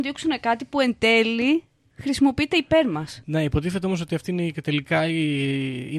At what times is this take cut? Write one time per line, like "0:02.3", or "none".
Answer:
none